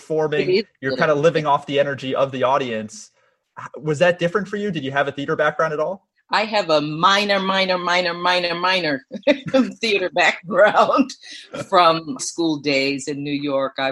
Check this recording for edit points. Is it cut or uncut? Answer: cut